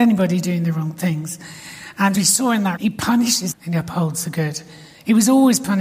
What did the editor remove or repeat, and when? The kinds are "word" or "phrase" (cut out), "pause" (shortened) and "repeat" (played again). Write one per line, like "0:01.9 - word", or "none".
0:02.1 - word
0:02.8 - word
0:03.5 - word